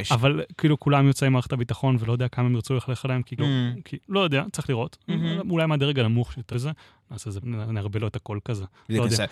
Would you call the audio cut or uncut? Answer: cut